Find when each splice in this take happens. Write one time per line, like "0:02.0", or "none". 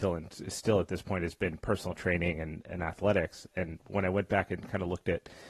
none